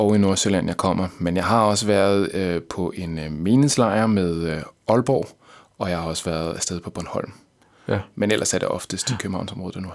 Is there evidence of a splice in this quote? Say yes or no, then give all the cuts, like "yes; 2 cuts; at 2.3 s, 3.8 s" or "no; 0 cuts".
no; 0 cuts